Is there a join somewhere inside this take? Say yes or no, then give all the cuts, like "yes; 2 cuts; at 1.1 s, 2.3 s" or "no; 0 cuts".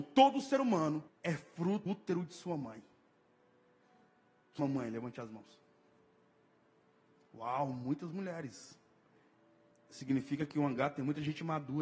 yes; 3 cuts; at 1.1 s, 1.9 s, 4.6 s